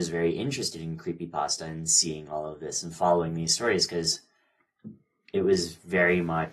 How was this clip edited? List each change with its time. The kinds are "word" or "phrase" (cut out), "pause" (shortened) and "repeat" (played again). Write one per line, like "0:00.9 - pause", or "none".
none